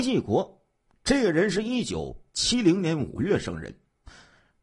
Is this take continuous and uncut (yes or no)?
yes